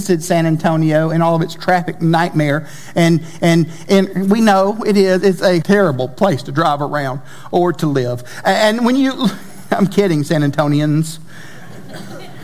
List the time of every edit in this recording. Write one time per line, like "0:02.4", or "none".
0:03.4
0:05.6